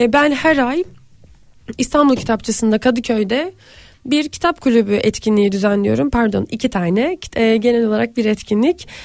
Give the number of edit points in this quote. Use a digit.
1